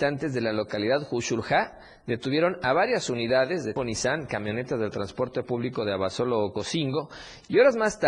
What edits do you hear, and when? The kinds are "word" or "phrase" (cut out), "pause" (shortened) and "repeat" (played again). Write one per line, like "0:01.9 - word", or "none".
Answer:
0:03.8 - word